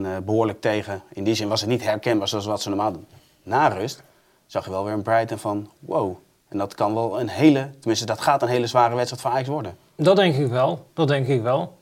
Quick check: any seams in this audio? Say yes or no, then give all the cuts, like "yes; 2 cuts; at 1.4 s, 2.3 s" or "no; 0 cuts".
no; 0 cuts